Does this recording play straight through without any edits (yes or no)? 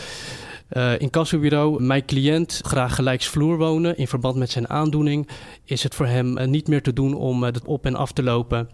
no